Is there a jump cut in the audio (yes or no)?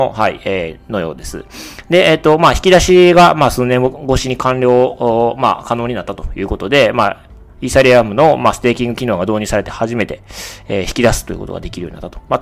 no